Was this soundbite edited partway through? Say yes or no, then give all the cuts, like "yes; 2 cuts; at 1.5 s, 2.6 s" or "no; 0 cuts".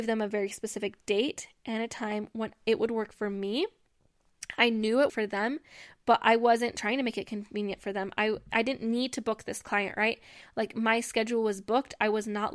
yes; 2 cuts; at 5.1 s, 8.5 s